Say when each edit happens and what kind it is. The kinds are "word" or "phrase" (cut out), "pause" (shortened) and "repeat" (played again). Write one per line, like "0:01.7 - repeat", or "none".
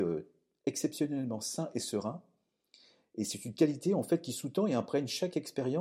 none